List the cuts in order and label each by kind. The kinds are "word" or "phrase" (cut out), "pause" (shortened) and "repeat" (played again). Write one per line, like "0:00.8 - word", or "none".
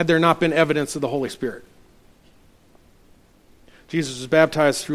none